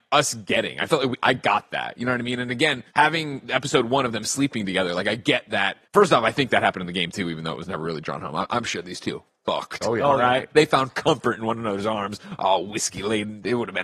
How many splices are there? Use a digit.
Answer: 2